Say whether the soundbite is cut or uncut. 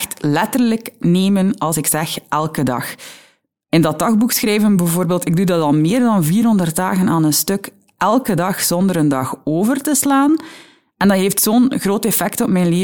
uncut